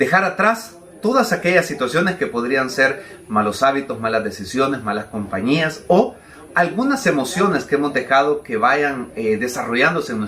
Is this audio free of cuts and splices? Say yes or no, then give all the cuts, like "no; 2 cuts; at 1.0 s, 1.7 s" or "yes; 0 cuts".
yes; 0 cuts